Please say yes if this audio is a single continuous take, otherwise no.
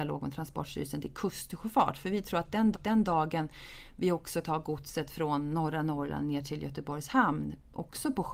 no